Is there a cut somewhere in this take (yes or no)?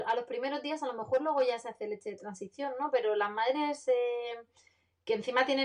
no